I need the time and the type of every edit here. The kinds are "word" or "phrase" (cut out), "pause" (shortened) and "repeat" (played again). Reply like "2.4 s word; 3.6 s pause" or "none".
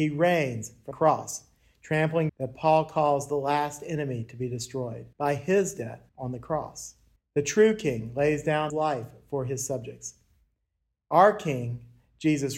0.9 s word; 2.3 s phrase; 5.1 s pause; 6.1 s pause; 7.2 s pause; 8.7 s word